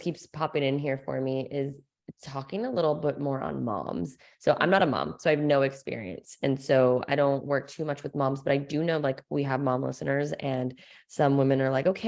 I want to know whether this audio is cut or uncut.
uncut